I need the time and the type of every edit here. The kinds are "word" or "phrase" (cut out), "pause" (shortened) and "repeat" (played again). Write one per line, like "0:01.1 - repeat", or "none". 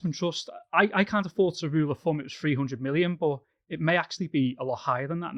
none